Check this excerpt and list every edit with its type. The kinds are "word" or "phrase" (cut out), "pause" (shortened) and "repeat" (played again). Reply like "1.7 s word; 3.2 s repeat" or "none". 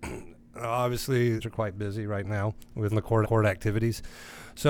1.4 s phrase; 2.9 s word; 3.2 s repeat

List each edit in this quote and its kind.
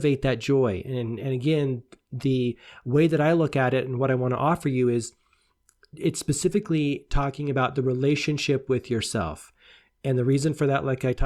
none

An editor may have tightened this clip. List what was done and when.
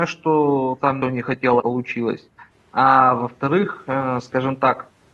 1.0 s word; 1.6 s phrase; 2.5 s pause

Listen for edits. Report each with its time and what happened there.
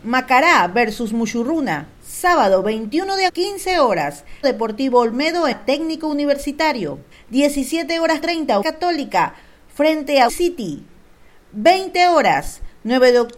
1.9 s pause; 3.3 s word; 4.4 s word; 5.5 s word; 7.1 s pause; 8.2 s word; 8.6 s word; 10.3 s word

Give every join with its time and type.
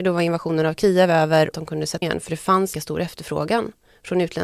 1.5 s phrase; 2.0 s word; 2.7 s phrase

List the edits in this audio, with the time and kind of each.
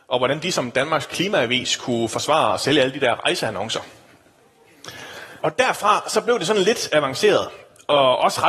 5.4 s pause

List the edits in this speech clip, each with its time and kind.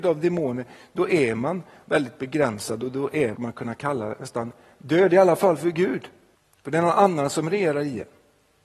3.3 s phrase; 6.3 s pause

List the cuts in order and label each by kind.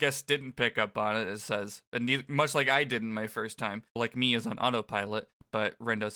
4.0 s word

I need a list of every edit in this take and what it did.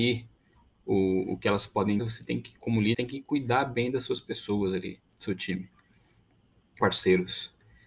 2.0 s phrase; 2.9 s word; 6.8 s word

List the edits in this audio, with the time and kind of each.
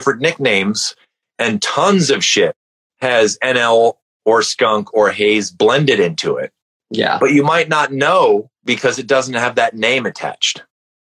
none

